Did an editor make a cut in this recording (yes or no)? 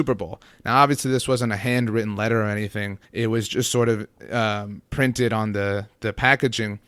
yes